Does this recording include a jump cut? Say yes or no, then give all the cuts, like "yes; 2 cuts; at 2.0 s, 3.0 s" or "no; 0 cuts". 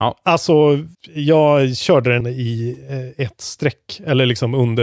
yes; 2 cuts; at 0.9 s, 2.2 s